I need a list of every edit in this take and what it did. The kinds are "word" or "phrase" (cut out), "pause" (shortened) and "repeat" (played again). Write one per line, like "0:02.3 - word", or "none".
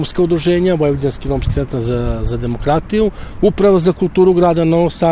none